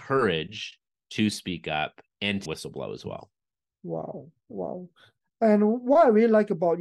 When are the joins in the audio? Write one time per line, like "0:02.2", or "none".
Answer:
0:02.5